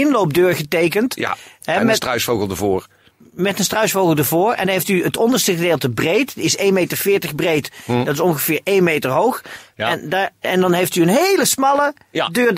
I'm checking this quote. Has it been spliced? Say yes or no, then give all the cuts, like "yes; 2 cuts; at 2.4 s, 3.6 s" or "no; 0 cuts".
no; 0 cuts